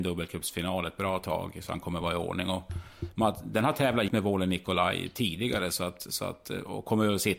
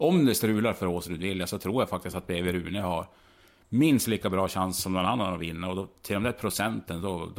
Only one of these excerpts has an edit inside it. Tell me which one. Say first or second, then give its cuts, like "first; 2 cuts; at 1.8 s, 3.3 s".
first; 1 cut; at 4.1 s